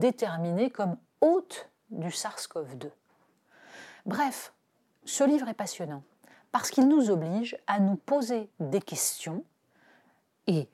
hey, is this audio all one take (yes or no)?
yes